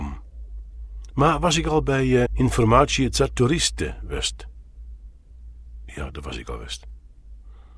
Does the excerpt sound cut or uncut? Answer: cut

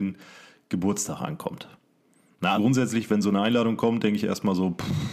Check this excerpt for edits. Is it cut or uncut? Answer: cut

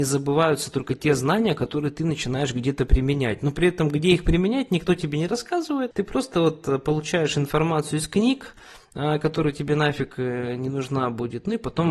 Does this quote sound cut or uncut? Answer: uncut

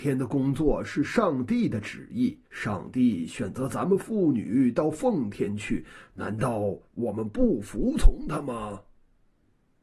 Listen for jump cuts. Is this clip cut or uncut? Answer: cut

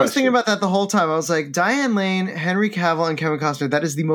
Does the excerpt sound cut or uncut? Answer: uncut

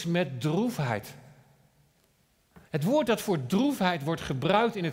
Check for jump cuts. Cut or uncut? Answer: cut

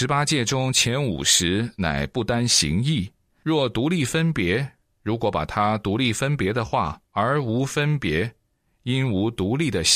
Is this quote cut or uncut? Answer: cut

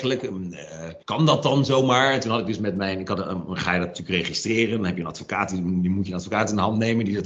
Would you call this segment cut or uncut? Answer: cut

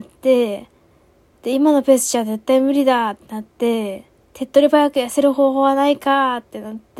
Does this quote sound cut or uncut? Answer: cut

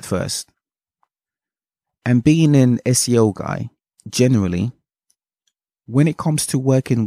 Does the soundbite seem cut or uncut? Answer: cut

